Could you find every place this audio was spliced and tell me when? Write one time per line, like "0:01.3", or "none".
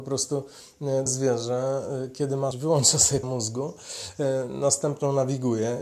0:01.1
0:02.5
0:03.2